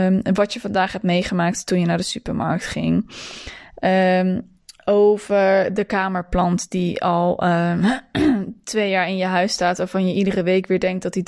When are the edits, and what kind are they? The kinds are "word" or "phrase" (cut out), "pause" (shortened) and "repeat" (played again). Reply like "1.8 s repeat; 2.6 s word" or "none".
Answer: none